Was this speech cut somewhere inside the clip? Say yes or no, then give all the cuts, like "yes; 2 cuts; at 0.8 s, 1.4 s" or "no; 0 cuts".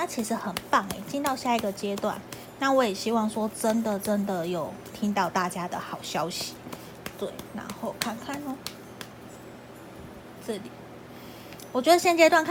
no; 0 cuts